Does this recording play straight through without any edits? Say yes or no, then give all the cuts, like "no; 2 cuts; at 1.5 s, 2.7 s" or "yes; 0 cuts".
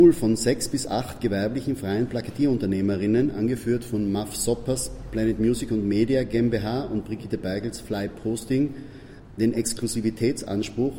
yes; 0 cuts